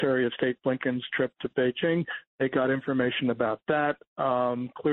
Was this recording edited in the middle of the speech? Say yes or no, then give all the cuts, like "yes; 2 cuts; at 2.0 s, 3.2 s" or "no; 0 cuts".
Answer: no; 0 cuts